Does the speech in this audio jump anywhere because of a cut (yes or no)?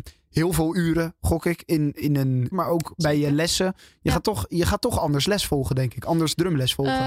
yes